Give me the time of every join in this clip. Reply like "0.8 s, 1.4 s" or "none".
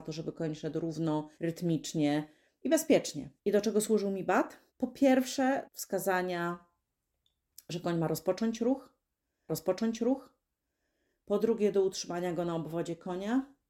1.3 s, 3.4 s, 4.7 s, 5.6 s, 9.5 s